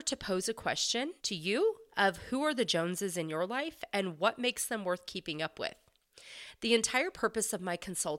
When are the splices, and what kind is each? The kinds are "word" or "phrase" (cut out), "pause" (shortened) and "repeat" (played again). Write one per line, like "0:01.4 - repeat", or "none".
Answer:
0:01.2 - pause